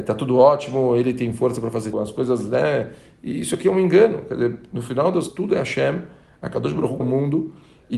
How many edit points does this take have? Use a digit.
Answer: 3